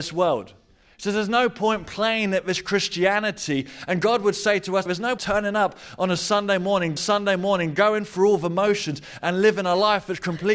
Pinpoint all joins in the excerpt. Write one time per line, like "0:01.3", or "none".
0:04.9
0:05.2
0:07.0

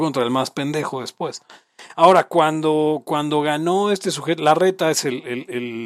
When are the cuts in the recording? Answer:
none

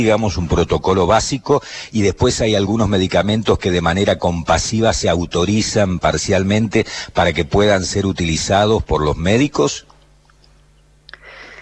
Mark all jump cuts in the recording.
0:08.8

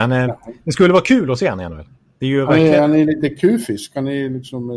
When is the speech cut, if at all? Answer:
none

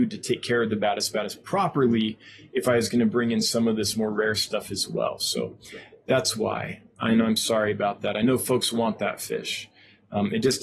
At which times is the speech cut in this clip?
none

